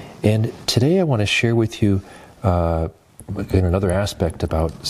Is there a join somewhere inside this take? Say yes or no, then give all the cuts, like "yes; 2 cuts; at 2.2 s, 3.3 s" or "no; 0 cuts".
no; 0 cuts